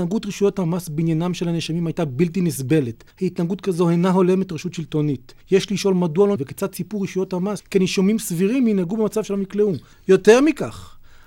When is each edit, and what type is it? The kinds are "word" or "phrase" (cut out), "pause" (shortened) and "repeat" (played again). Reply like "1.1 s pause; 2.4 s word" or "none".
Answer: 3.1 s pause; 5.4 s pause; 6.4 s phrase; 7.6 s word; 9.9 s pause